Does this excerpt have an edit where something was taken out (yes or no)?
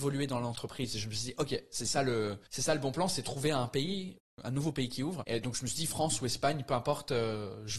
yes